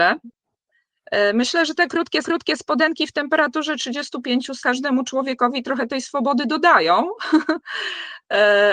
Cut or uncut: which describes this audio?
cut